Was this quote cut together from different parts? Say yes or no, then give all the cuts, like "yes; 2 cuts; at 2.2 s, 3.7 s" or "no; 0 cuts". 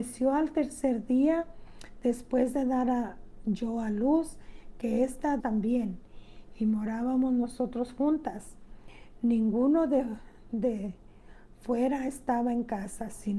yes; 1 cut; at 5.4 s